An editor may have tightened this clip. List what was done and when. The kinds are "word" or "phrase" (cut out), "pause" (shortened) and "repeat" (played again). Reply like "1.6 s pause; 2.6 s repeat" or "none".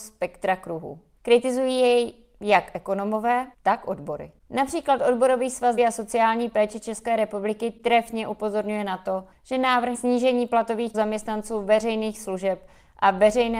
3.5 s pause; 5.8 s word; 9.9 s word; 10.9 s word